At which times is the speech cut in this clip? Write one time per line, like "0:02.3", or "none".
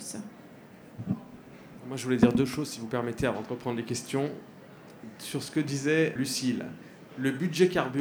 0:06.2